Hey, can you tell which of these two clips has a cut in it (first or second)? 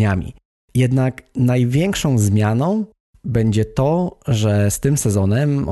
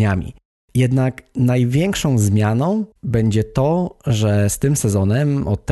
second